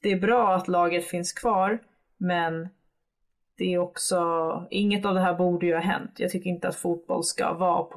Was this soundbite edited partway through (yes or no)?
no